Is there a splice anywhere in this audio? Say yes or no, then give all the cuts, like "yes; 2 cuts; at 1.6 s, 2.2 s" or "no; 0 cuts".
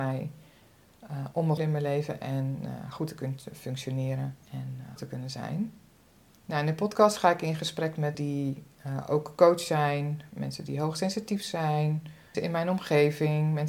yes; 6 cuts; at 1.6 s, 4.4 s, 5.0 s, 6.0 s, 8.1 s, 12.3 s